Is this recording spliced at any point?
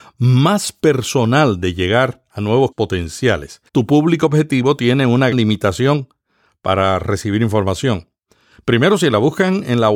yes; 3 cuts; at 2.7 s, 3.7 s, 5.3 s

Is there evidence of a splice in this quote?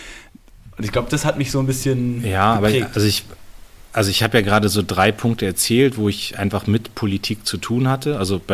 no; 0 cuts

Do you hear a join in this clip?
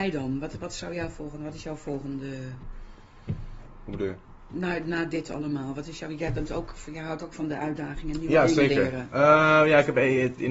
no; 0 cuts

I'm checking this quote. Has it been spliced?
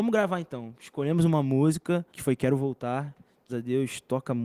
yes; 2 cuts; at 2.1 s, 3.5 s

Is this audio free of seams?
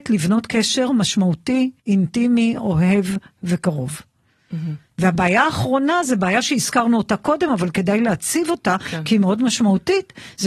no; 1 cut; at 1.8 s

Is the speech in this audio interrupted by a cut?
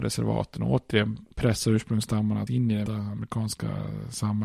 yes; 3 cuts; at 1.3 s, 2.5 s, 2.9 s

